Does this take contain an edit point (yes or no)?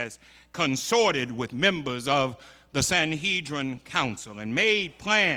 no